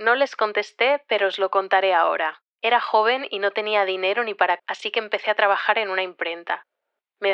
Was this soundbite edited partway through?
yes; 1 cut; at 4.6 s

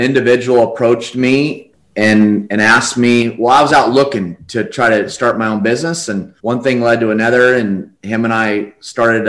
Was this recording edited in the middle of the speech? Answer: yes; 1 cut; at 6.4 s

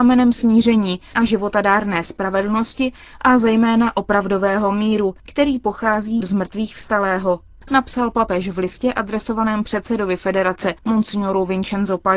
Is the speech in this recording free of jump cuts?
no; 3 cuts; at 5.2 s, 6.2 s, 10.8 s

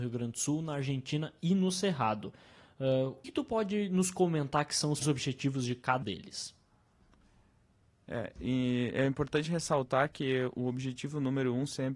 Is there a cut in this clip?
yes; 3 cuts; at 3.2 s, 5.0 s, 6.0 s

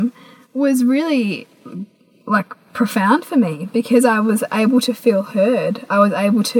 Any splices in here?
no; 0 cuts

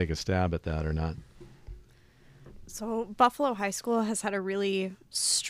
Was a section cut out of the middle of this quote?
no; 0 cuts

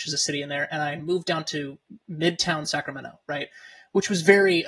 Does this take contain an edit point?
no; 0 cuts

